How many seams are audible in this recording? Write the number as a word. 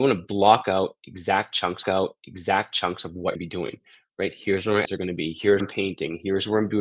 four